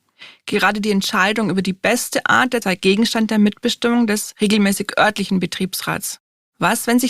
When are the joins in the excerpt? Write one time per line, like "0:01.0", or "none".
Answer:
0:02.6